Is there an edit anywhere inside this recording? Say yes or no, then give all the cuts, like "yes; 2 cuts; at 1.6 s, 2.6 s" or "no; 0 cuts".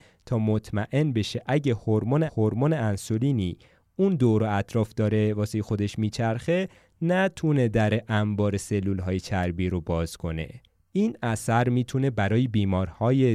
yes; 2 cuts; at 2.3 s, 10.7 s